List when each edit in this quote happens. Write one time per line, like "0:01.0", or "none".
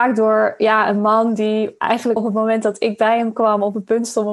0:02.2